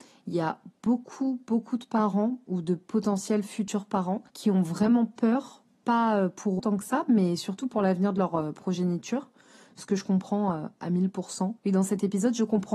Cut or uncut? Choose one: cut